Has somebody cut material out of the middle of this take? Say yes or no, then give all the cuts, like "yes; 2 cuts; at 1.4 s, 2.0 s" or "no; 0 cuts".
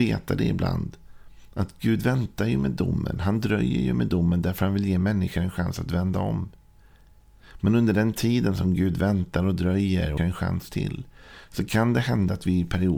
yes; 1 cut; at 10.2 s